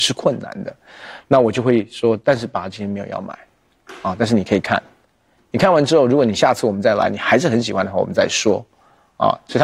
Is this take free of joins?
yes; 0 cuts

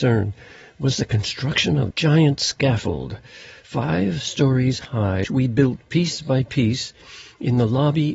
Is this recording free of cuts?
no; 2 cuts; at 1.9 s, 5.2 s

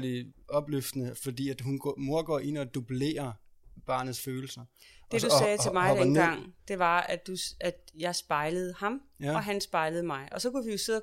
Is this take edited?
no; 0 cuts

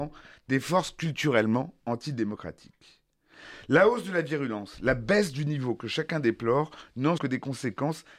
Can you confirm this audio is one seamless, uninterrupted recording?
no; 1 cut; at 7.2 s

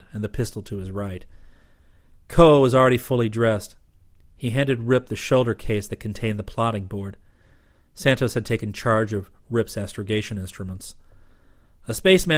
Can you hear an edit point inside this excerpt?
no; 0 cuts

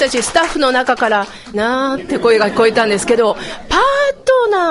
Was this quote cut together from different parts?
yes; 1 cut; at 1.5 s

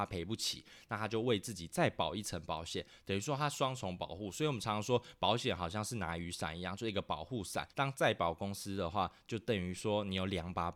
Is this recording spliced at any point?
yes; 1 cut; at 7.7 s

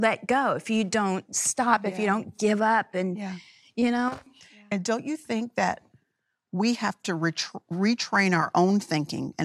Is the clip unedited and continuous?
yes; 0 cuts

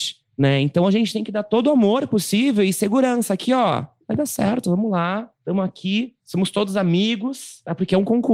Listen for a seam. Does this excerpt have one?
no; 0 cuts

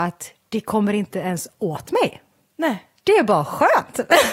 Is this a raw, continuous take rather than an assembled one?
yes; 0 cuts

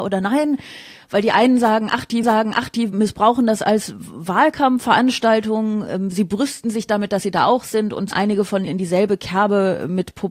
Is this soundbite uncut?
no; 4 cuts; at 2.2 s, 6.1 s, 8.1 s, 8.7 s

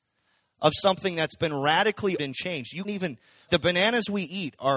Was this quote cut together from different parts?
yes; 3 cuts; at 2.2 s, 2.8 s, 3.5 s

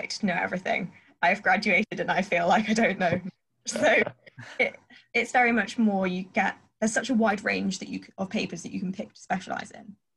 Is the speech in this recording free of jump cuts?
yes; 0 cuts

